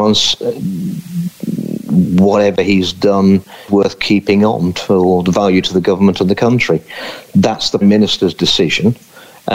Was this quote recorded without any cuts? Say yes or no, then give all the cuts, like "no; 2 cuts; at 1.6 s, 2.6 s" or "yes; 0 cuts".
no; 2 cuts; at 3.7 s, 7.8 s